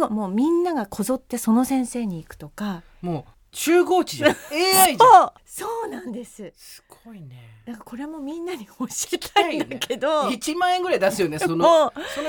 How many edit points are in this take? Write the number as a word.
two